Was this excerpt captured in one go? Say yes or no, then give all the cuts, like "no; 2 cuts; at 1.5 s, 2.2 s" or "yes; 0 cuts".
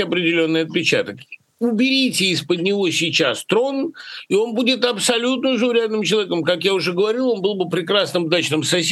yes; 0 cuts